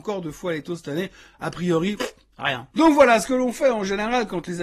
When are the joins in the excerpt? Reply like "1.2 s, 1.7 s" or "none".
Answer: none